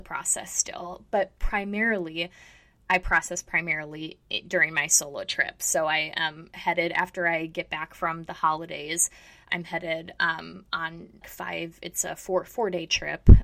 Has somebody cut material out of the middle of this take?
yes; 1 cut; at 11.2 s

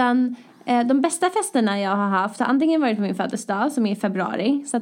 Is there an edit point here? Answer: no; 0 cuts

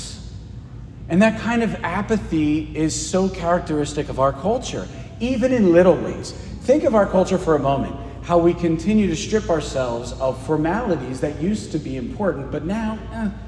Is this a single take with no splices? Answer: yes; 0 cuts

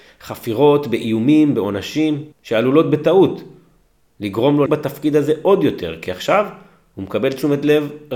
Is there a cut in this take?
yes; 2 cuts; at 2.3 s, 4.7 s

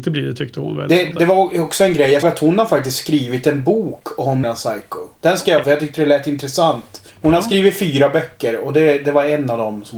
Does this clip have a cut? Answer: yes; 6 cuts; at 1.1 s, 2.2 s, 4.4 s, 5.1 s, 5.6 s, 7.1 s

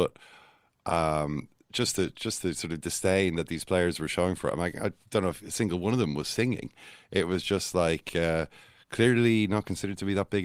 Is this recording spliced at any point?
no; 0 cuts

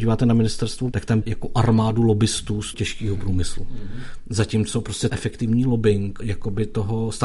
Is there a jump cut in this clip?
yes; 5 cuts; at 0.9 s, 1.2 s, 2.7 s, 5.1 s, 6.2 s

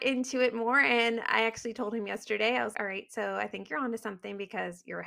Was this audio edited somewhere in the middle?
yes; 1 cut; at 2.7 s

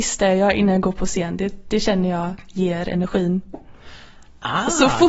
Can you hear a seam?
no; 0 cuts

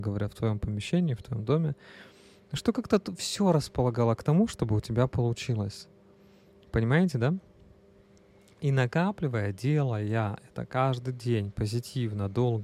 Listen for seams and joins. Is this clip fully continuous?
yes; 0 cuts

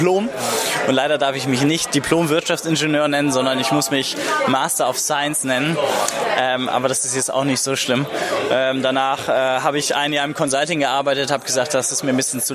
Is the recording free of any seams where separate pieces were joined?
yes; 0 cuts

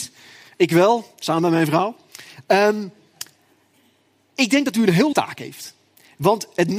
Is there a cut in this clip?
yes; 1 cut; at 5.1 s

